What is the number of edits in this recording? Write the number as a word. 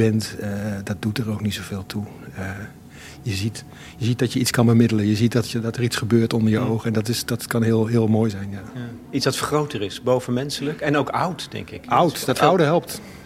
zero